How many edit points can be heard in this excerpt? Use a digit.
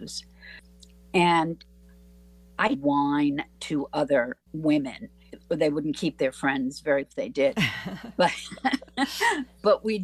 3